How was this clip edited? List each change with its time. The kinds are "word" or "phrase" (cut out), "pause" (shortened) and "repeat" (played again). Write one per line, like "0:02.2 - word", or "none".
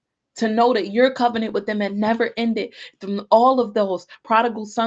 none